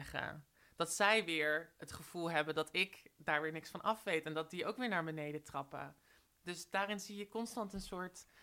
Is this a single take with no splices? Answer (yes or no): yes